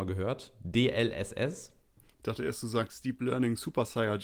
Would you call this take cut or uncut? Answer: uncut